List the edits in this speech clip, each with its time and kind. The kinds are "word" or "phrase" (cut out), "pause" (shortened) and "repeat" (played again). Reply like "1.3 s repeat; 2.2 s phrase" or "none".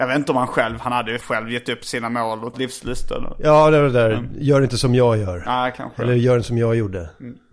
1.2 s word; 2.5 s word